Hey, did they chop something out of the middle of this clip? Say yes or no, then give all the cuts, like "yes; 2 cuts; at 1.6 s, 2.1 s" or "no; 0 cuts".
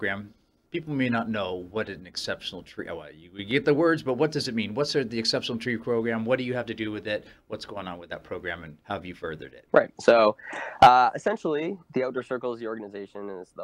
yes; 2 cuts; at 8.8 s, 9.7 s